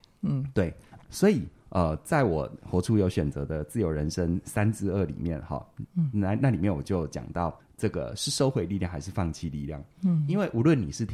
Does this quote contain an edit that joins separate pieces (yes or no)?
yes